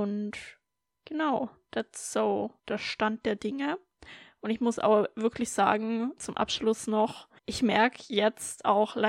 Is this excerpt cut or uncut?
cut